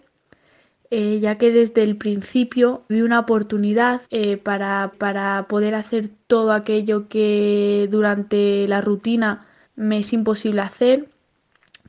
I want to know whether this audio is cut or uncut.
cut